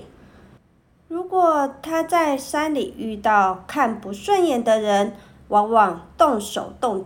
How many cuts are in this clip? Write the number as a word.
zero